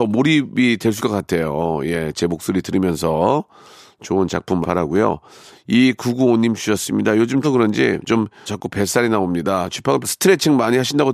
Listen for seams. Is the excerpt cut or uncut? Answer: cut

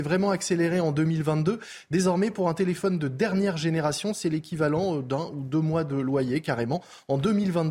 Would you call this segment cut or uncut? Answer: uncut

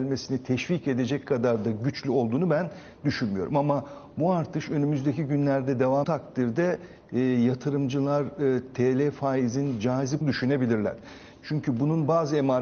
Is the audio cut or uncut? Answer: cut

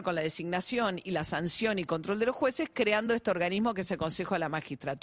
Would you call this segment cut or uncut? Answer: uncut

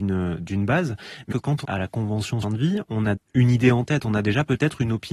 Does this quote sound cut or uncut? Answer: cut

